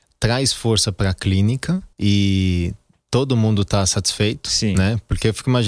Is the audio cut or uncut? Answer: cut